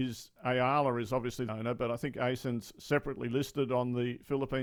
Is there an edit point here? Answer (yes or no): yes